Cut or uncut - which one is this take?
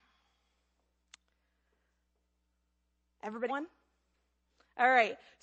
cut